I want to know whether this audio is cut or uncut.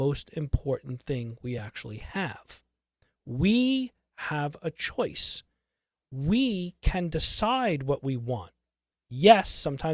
uncut